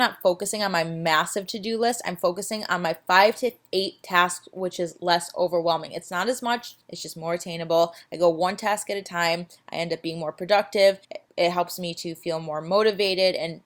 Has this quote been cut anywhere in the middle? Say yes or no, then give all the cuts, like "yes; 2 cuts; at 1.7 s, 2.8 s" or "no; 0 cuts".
yes; 2 cuts; at 6.8 s, 11.0 s